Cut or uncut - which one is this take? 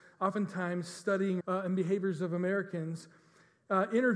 cut